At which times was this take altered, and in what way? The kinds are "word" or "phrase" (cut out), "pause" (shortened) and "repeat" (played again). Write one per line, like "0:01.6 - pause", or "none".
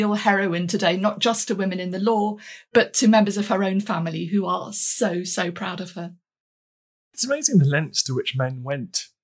none